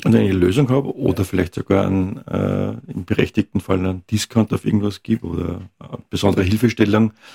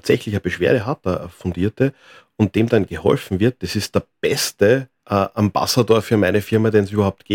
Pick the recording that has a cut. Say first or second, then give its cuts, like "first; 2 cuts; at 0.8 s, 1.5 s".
second; 1 cut; at 5.0 s